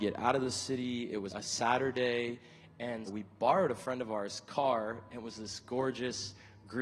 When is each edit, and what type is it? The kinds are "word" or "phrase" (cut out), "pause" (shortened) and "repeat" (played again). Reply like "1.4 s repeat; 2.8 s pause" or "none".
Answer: 1.3 s word; 3.1 s phrase